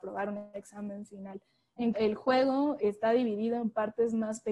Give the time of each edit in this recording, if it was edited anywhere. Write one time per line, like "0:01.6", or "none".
0:01.9
0:02.8